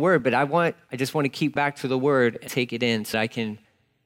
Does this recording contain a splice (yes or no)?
yes